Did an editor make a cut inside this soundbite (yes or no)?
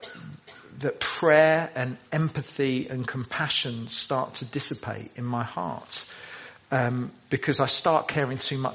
no